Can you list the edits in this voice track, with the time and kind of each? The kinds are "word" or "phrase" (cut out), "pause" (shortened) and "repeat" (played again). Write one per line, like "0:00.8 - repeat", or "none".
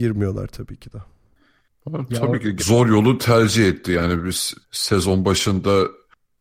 0:02.6 - word
0:04.6 - pause